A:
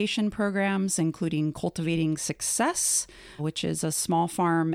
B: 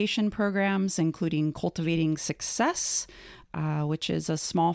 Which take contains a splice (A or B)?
A